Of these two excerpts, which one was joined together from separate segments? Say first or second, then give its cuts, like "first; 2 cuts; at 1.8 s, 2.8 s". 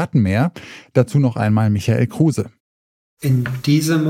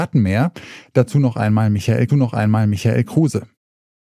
second; 1 cut; at 2.1 s